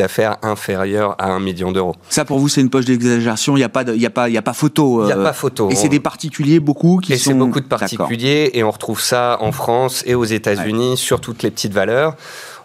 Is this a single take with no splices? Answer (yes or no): yes